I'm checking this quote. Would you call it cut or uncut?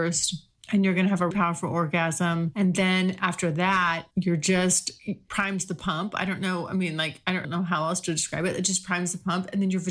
cut